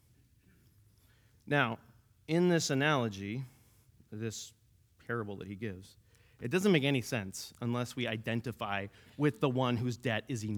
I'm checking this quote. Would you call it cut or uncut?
uncut